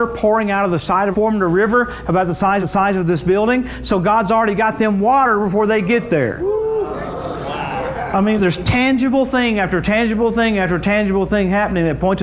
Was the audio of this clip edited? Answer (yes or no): yes